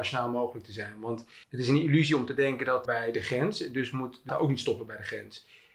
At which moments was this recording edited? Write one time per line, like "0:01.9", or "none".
0:01.4
0:02.8
0:04.3